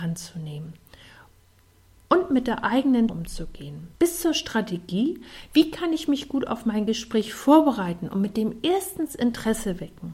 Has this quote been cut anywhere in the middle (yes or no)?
yes